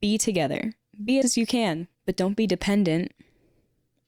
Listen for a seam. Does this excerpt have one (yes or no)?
yes